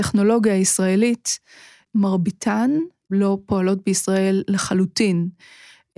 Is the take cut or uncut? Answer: uncut